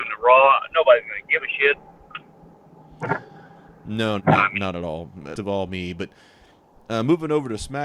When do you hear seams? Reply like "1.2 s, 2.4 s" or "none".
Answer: 4.2 s, 5.3 s